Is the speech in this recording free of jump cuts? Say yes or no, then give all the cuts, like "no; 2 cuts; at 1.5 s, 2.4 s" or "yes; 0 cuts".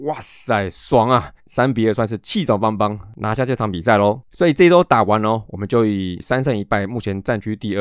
no; 2 cuts; at 1.4 s, 4.3 s